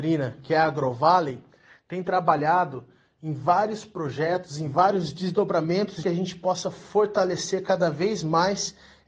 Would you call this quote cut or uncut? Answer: cut